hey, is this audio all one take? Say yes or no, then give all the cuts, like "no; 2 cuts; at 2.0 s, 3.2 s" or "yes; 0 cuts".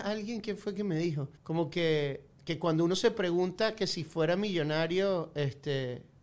no; 2 cuts; at 1.4 s, 2.3 s